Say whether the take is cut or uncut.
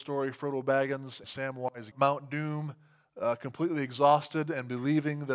cut